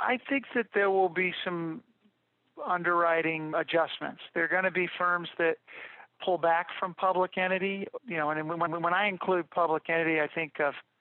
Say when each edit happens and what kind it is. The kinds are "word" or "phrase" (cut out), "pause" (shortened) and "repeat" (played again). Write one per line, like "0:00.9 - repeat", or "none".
0:03.5 - word
0:08.7 - repeat